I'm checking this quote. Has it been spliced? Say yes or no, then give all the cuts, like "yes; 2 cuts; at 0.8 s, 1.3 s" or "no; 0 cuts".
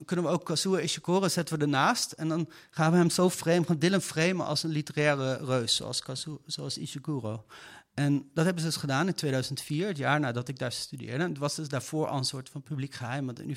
no; 0 cuts